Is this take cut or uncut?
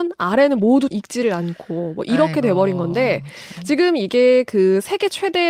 cut